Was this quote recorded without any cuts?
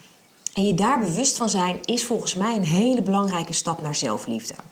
yes; 0 cuts

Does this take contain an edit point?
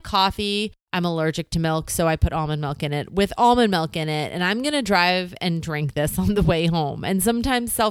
no; 0 cuts

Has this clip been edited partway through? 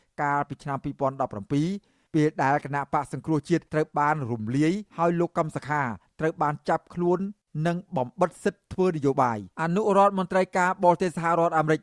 yes; 3 cuts; at 3.7 s, 4.9 s, 9.5 s

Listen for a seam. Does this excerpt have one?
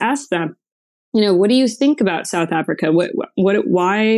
no; 0 cuts

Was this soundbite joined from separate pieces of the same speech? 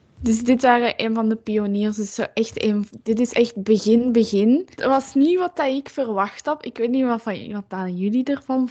yes; 1 cut; at 4.7 s

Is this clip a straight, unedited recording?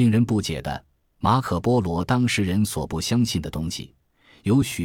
yes; 0 cuts

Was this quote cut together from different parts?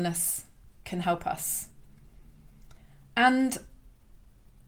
no; 0 cuts

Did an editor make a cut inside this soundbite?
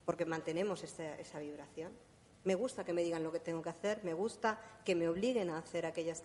no; 0 cuts

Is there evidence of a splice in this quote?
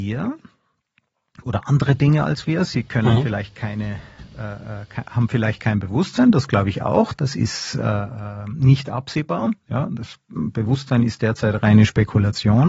no; 0 cuts

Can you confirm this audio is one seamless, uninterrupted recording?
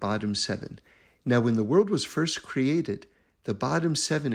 yes; 0 cuts

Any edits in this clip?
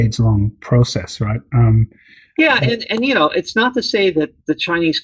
no; 0 cuts

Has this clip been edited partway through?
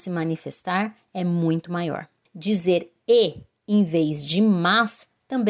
no; 0 cuts

